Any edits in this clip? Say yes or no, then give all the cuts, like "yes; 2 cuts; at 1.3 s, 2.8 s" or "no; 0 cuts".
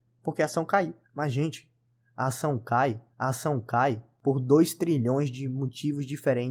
yes; 2 cuts; at 1.0 s, 3.1 s